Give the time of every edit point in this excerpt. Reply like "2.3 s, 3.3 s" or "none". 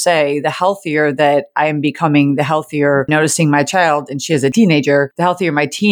3.1 s